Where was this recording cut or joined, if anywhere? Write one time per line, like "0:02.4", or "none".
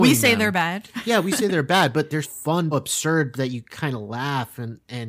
0:02.2
0:02.7

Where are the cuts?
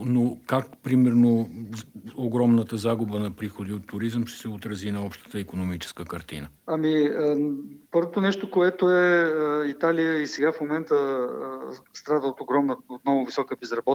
0:06.6

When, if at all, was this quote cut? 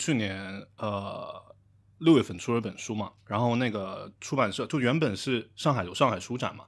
0:03.2

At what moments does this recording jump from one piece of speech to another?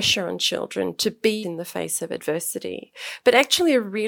0:01.4

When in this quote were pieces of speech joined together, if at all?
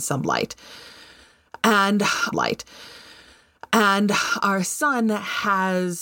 0:02.3

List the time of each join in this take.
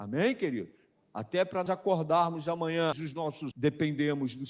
0:01.7
0:02.9
0:03.5

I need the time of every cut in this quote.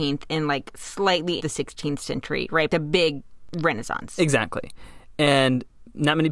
0:01.4
0:02.7

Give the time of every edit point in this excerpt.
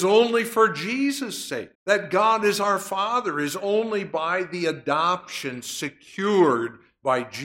0:01.7

